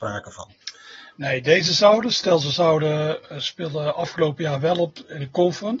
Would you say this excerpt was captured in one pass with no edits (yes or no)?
yes